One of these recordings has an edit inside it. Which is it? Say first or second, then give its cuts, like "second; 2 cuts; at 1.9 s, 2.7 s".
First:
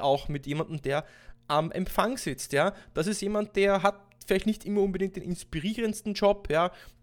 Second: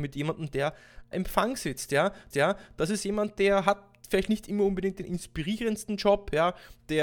second; 2 cuts; at 1.1 s, 2.3 s